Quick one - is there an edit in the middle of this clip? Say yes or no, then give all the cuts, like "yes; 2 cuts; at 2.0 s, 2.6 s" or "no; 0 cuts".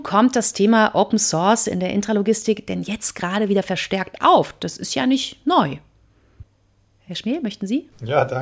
no; 0 cuts